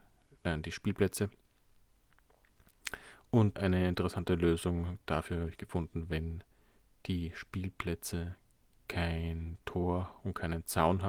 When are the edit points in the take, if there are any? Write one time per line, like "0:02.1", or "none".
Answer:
0:03.6